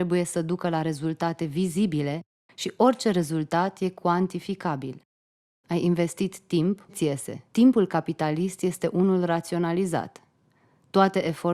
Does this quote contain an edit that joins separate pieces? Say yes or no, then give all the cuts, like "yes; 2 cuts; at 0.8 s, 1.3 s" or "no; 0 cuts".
yes; 2 cuts; at 6.9 s, 7.5 s